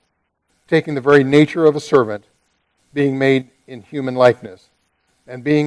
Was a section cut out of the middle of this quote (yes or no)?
no